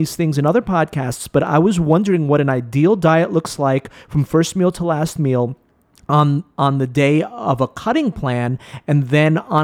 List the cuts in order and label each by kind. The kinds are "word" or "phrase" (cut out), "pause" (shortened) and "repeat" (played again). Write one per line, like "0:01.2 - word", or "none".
none